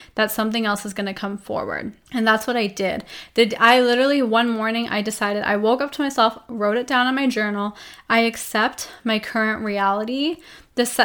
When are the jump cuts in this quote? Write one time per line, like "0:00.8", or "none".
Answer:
0:02.1